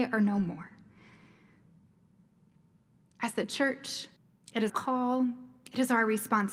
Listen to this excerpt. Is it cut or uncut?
cut